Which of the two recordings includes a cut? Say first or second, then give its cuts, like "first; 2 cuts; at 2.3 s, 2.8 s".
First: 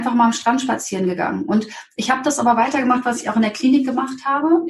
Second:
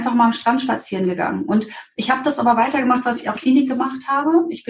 second; 1 cut; at 3.3 s